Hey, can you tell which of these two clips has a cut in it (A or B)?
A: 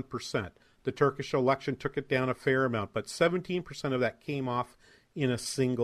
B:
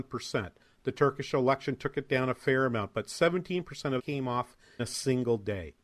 B